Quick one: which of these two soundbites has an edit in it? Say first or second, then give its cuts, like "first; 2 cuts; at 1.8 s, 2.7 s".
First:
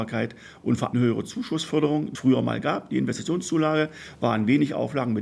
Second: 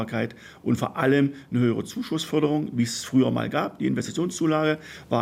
first; 2 cuts; at 0.9 s, 2.1 s